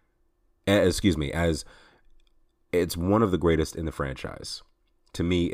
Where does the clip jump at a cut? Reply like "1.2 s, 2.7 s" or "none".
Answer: none